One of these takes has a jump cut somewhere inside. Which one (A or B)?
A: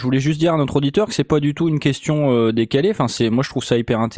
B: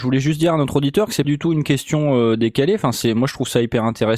B